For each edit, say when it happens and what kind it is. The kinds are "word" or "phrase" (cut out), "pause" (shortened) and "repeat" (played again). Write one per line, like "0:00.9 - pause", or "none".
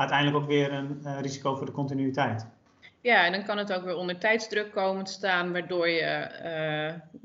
none